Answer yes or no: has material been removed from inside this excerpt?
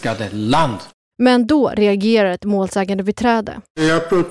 no